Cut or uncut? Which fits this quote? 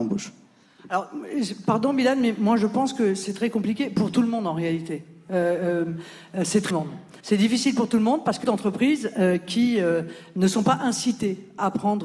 cut